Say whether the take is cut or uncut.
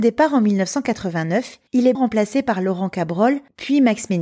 cut